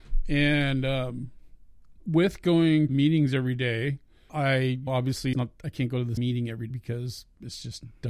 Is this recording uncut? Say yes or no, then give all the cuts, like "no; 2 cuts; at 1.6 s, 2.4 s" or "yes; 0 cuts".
no; 7 cuts; at 2.0 s, 2.9 s, 4.3 s, 4.9 s, 5.3 s, 6.2 s, 6.7 s